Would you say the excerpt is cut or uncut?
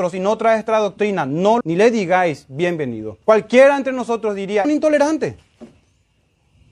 cut